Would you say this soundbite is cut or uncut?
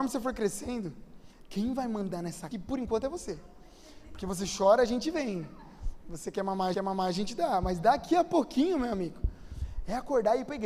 cut